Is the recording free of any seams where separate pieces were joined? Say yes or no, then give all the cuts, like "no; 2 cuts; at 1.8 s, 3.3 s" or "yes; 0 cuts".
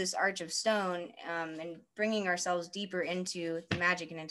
yes; 0 cuts